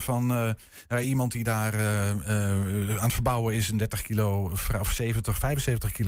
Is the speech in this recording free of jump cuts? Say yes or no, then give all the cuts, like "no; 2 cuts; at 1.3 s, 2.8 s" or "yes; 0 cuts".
yes; 0 cuts